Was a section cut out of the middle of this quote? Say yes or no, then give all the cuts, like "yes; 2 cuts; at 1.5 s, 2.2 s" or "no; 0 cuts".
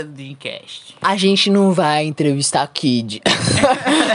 no; 0 cuts